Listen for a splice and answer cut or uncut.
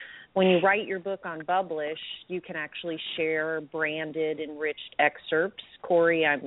uncut